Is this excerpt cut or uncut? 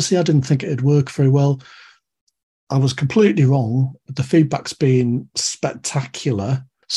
uncut